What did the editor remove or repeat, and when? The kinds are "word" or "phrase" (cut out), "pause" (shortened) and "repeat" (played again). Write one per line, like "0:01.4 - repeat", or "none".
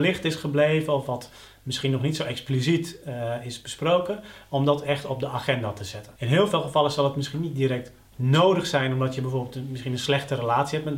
0:06.2 - pause